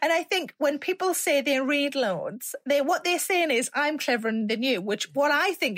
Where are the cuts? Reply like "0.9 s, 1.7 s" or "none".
none